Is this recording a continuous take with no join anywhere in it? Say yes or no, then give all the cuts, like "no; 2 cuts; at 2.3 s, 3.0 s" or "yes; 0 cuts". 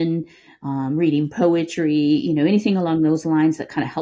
yes; 0 cuts